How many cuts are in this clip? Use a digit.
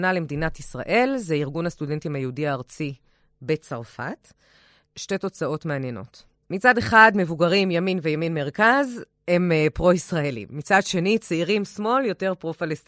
0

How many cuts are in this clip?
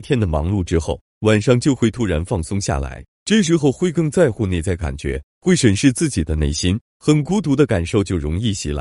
2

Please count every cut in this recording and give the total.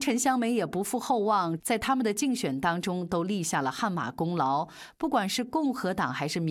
1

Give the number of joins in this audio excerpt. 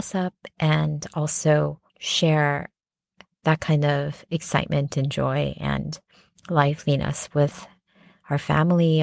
1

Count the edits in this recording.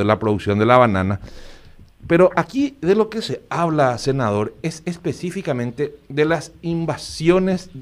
0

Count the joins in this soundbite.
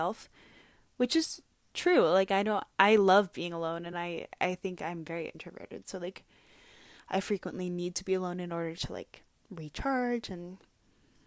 0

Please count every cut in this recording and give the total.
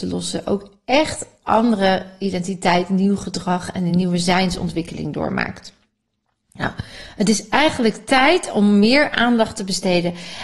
0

